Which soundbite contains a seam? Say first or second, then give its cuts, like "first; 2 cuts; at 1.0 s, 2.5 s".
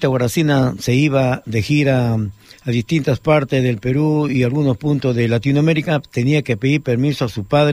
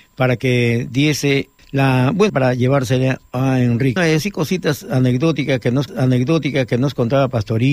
second; 4 cuts; at 1.6 s, 2.3 s, 4.0 s, 5.9 s